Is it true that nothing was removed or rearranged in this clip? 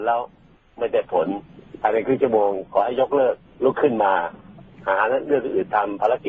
no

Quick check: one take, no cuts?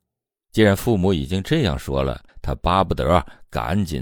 no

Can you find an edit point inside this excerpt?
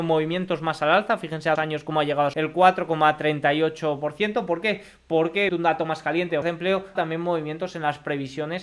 yes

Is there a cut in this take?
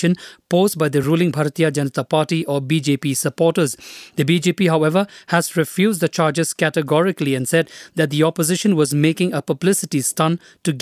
no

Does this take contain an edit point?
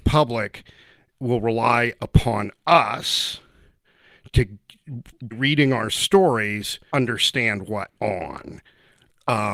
yes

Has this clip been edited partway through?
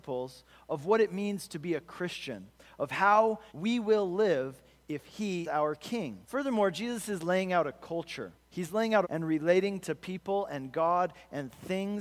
yes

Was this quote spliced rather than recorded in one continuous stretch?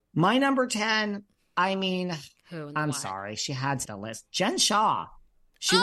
yes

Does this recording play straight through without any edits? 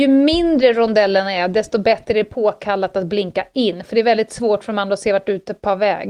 yes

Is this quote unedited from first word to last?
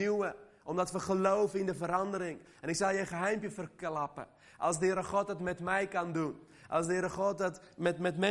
yes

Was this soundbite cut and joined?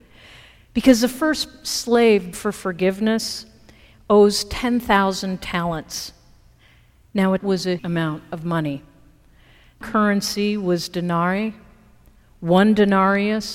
yes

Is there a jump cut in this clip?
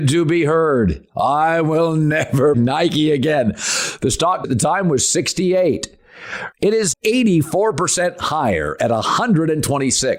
yes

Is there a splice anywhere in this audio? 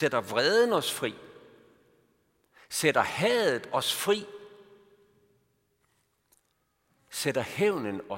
no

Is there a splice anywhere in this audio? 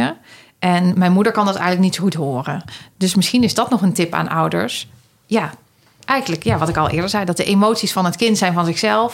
no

